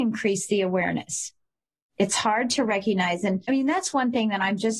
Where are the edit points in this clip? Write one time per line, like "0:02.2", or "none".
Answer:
none